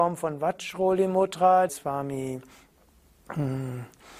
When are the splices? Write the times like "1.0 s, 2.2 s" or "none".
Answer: 1.7 s